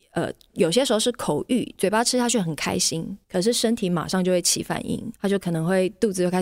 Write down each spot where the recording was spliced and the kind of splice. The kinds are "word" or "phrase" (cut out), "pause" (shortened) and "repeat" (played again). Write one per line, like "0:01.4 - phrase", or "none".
0:03.2 - pause
0:05.2 - pause